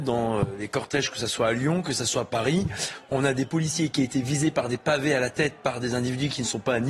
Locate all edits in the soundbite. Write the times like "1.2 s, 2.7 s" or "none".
none